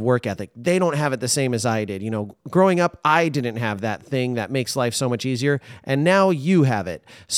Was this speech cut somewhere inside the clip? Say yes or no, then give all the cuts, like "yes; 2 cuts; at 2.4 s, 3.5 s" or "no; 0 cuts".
no; 0 cuts